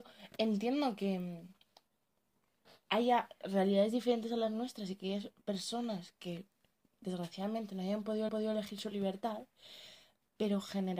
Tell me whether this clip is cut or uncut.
cut